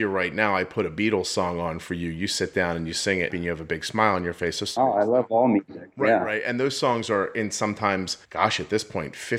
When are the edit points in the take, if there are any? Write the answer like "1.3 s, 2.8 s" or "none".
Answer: 3.3 s, 8.2 s